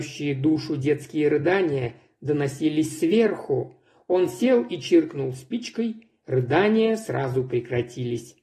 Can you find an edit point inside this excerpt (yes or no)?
no